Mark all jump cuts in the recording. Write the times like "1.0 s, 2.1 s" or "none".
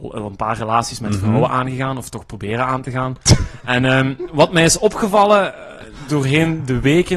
none

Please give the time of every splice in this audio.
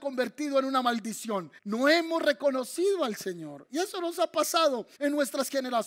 1.6 s, 4.9 s

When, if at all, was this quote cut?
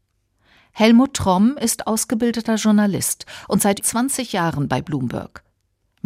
3.8 s

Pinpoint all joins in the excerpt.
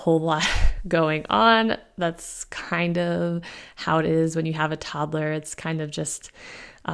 none

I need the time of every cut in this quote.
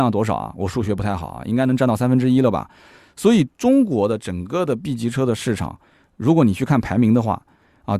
none

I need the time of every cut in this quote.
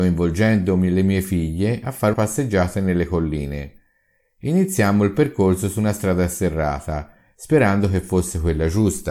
2.1 s

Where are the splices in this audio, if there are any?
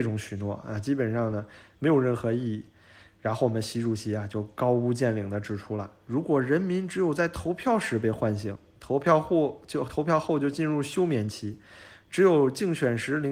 none

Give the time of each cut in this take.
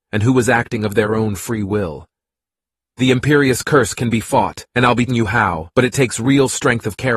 4.7 s, 5.1 s, 5.7 s

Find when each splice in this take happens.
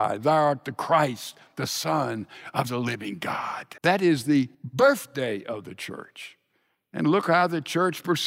3.8 s, 4.5 s

